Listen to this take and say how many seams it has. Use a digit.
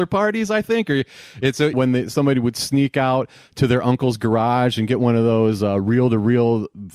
1